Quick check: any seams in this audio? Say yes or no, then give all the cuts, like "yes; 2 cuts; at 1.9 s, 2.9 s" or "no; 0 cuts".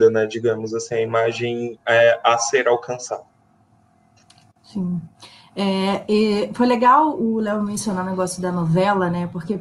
no; 0 cuts